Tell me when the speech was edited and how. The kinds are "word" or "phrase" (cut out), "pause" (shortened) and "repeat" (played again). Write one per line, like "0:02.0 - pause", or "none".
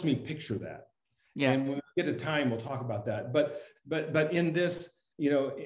none